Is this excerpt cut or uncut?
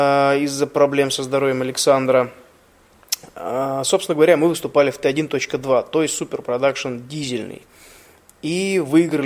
uncut